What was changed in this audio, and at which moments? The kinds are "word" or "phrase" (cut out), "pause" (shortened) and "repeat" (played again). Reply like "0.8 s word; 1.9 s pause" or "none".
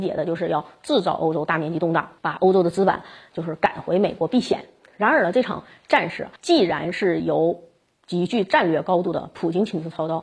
2.2 s pause; 6.4 s pause